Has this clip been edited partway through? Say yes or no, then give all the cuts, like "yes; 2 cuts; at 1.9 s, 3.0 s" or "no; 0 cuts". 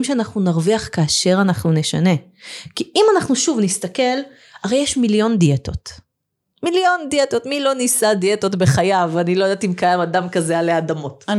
no; 0 cuts